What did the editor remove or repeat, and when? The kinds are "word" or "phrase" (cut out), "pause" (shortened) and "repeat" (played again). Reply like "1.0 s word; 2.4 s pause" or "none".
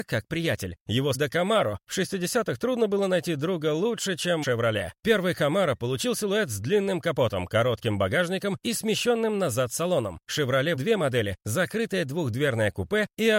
1.1 s word; 4.4 s word; 10.8 s word